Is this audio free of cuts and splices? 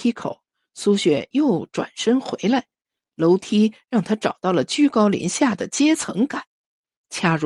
yes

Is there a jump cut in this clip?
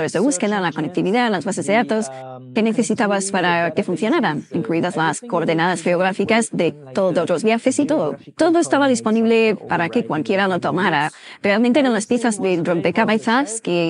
yes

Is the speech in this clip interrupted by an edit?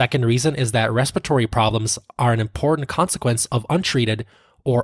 no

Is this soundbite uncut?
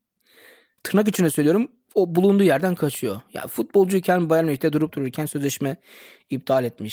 yes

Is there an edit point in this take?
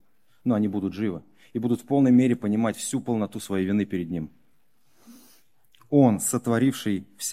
no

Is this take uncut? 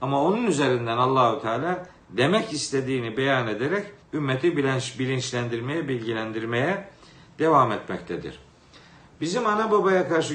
no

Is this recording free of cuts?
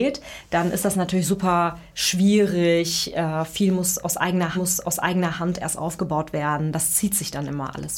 no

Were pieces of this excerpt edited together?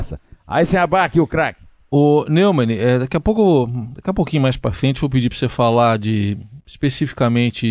no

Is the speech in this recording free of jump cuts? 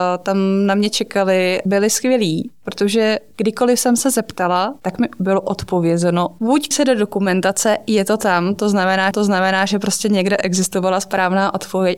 no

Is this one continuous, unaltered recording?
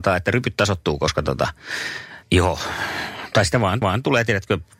no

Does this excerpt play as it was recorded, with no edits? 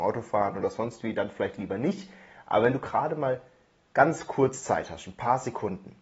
yes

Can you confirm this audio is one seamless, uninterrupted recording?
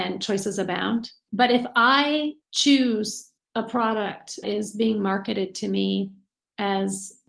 no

